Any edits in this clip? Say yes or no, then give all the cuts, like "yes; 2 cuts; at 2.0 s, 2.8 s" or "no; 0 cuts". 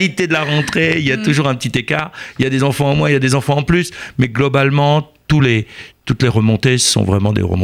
no; 0 cuts